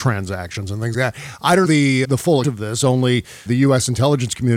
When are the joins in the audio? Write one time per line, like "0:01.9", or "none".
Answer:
0:00.9
0:01.6
0:02.0
0:02.4
0:03.5